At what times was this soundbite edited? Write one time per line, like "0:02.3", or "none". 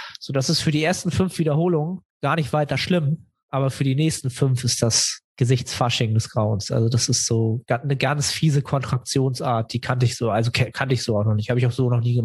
0:02.1
0:05.3